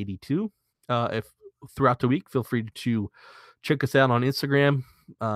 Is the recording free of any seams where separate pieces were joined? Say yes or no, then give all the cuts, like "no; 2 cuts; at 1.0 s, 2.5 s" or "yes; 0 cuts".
yes; 0 cuts